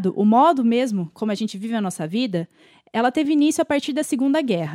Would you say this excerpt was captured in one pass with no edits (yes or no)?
yes